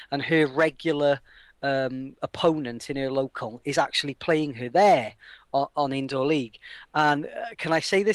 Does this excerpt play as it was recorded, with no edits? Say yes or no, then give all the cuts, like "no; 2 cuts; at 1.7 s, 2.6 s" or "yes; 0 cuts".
yes; 0 cuts